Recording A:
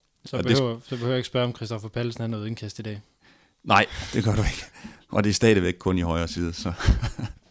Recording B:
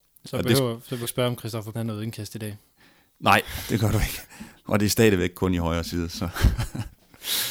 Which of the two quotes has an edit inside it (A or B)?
B